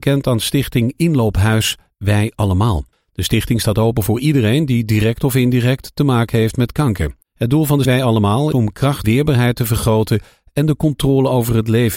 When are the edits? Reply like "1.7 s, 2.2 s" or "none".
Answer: 2.9 s, 7.2 s, 7.8 s, 8.5 s, 9.0 s